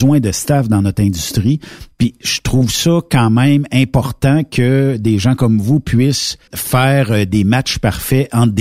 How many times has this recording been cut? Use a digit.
1